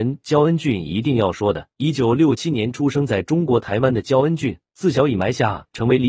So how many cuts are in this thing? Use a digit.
2